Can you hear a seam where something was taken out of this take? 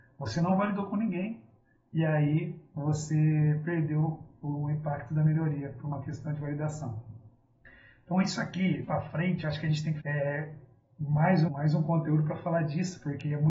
yes; 3 cuts; at 8.8 s, 10.0 s, 11.5 s

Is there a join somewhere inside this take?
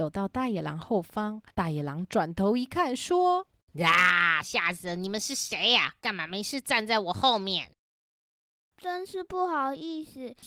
yes; 3 cuts; at 1.5 s, 3.5 s, 4.4 s

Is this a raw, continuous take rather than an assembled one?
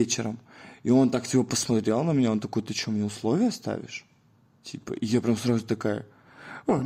yes; 0 cuts

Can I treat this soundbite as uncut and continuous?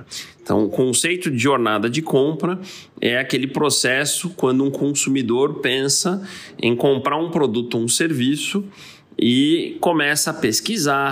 yes; 0 cuts

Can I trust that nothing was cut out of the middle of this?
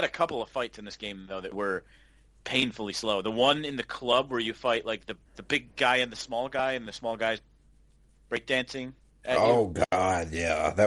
no; 2 cuts; at 1.5 s, 5.3 s

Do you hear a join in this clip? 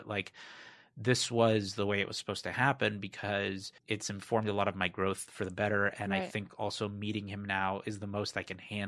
yes; 1 cut; at 3.8 s

